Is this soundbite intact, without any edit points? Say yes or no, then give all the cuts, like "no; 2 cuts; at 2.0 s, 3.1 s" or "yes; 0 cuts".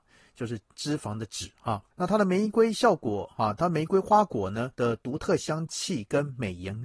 no; 2 cuts; at 1.9 s, 4.7 s